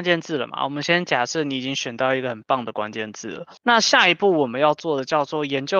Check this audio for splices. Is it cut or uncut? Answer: cut